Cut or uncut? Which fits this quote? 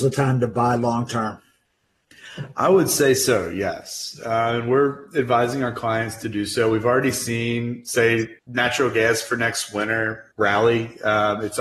cut